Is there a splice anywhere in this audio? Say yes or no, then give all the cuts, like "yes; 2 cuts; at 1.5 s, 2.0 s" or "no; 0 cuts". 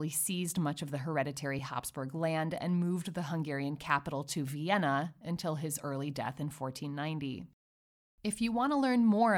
no; 0 cuts